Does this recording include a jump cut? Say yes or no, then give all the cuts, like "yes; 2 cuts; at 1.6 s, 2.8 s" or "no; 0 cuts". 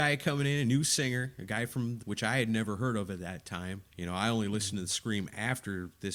yes; 2 cuts; at 2.0 s, 3.9 s